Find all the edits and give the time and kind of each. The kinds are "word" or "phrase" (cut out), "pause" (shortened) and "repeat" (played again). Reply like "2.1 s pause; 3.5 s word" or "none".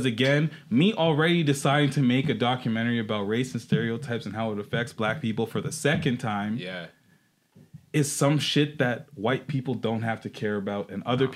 7.9 s pause